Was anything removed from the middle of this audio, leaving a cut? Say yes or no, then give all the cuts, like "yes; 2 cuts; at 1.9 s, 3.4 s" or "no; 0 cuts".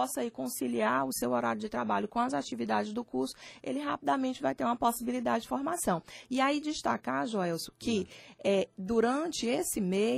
no; 0 cuts